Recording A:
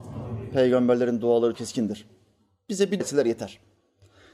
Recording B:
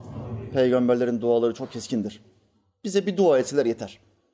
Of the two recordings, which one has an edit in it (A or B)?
A